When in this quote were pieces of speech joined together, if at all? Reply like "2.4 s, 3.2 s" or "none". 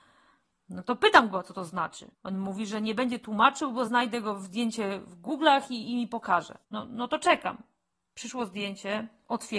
2.1 s, 3.9 s, 6.6 s